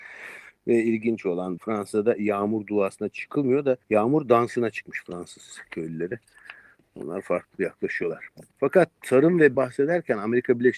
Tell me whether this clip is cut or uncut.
cut